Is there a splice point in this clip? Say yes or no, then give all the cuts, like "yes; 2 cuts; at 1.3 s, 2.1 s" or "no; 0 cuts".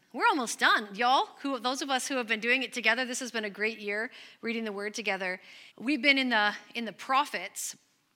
yes; 1 cut; at 5.7 s